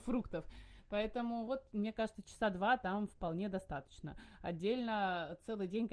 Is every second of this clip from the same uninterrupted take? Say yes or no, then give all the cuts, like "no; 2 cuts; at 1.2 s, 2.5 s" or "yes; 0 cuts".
yes; 0 cuts